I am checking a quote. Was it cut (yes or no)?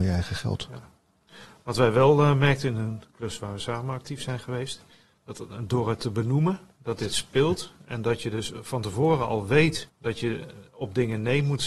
yes